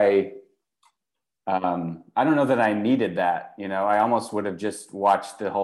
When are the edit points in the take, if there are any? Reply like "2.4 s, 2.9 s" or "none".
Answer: none